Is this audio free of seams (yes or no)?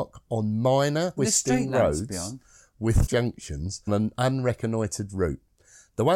no